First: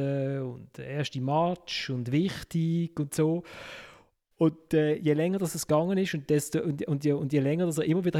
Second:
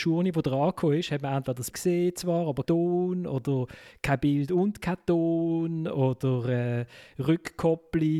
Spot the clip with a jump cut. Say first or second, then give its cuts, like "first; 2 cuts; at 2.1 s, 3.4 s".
second; 2 cuts; at 1.7 s, 2.6 s